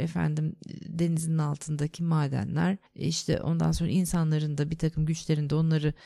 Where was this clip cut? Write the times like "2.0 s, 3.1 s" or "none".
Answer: 2.9 s